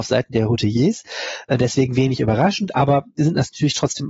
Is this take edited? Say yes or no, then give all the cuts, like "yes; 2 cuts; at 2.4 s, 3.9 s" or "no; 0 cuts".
no; 0 cuts